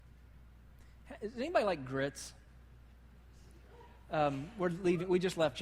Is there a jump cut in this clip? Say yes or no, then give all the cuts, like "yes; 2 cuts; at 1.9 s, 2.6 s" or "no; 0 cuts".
no; 0 cuts